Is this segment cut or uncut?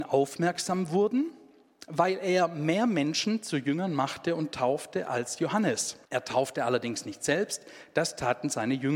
cut